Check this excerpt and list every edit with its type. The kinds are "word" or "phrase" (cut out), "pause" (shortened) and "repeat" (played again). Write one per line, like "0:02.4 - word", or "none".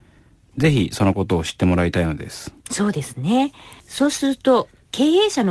0:02.6 - pause
0:03.8 - pause